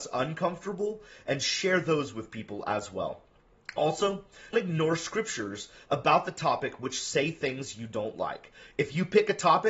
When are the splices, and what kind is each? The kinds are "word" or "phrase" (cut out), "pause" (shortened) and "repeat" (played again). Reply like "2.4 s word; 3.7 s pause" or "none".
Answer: 4.5 s word